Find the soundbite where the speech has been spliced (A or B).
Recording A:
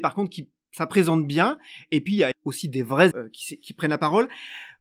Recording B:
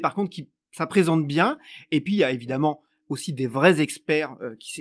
A